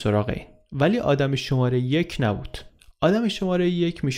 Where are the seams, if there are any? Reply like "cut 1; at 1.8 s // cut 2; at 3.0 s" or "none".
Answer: none